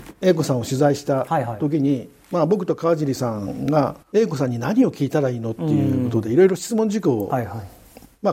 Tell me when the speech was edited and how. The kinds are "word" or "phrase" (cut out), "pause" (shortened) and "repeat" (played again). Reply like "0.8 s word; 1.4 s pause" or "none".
4.0 s pause